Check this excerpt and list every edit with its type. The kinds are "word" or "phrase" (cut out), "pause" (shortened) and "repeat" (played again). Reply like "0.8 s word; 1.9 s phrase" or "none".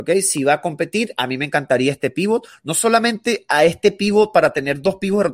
none